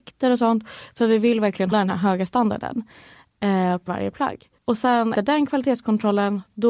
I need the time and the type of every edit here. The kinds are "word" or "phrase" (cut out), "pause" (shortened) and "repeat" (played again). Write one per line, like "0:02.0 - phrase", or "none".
0:01.7 - word
0:03.9 - word
0:04.6 - pause
0:05.2 - word